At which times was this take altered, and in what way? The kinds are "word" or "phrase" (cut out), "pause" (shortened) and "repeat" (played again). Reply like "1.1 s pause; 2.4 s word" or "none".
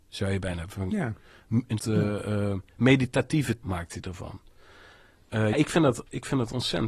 1.8 s word; 3.6 s word; 5.5 s word